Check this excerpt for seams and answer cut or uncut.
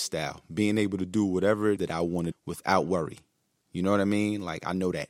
cut